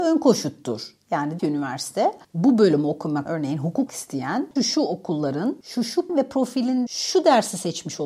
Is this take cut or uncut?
cut